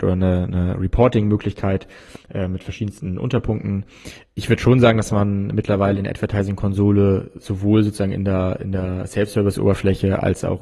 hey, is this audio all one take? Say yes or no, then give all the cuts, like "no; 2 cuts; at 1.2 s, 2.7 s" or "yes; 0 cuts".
yes; 0 cuts